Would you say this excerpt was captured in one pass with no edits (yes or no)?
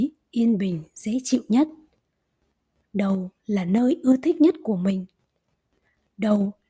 yes